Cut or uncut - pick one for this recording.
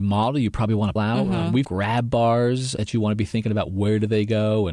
cut